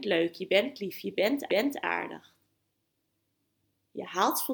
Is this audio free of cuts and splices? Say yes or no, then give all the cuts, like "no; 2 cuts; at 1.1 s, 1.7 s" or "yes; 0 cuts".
no; 1 cut; at 1.5 s